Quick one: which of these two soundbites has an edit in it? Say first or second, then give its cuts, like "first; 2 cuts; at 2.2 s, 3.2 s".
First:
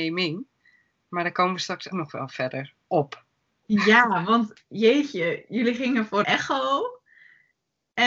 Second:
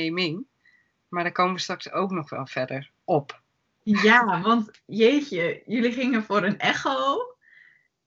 first; 2 cuts; at 1.9 s, 6.2 s